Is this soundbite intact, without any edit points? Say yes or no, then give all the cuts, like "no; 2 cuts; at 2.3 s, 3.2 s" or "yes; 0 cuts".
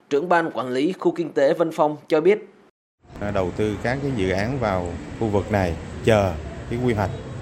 yes; 0 cuts